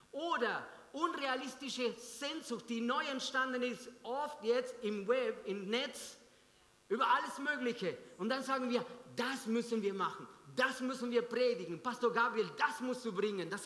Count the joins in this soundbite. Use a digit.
0